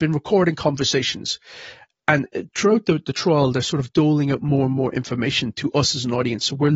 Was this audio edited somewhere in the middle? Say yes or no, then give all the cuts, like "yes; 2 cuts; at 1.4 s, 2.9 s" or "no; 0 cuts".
no; 0 cuts